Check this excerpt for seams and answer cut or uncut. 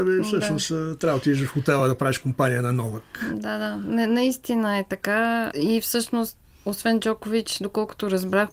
uncut